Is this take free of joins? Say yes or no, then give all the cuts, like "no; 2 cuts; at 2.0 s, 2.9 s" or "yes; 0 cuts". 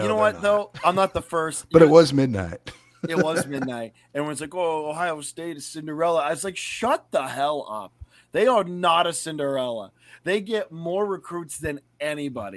yes; 0 cuts